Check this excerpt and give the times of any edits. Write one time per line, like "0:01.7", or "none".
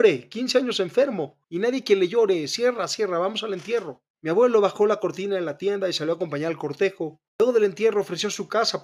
0:01.4
0:04.1
0:07.3